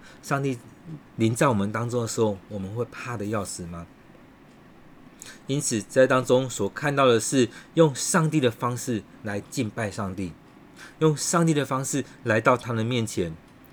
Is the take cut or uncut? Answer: cut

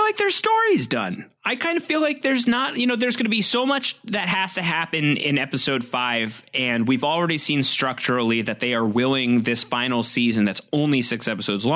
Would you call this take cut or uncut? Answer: uncut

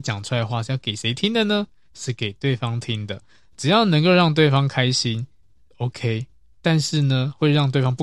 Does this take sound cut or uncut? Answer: uncut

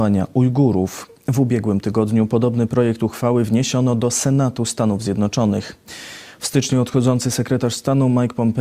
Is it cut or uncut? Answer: uncut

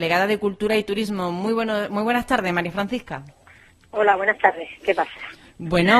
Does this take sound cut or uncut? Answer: uncut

